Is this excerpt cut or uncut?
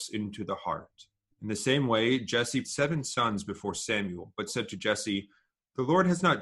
cut